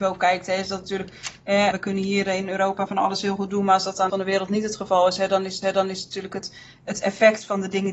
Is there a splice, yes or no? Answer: yes